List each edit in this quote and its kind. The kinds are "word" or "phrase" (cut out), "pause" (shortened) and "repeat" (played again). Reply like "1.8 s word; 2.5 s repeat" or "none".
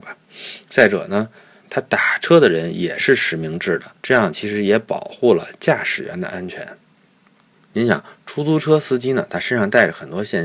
1.6 s phrase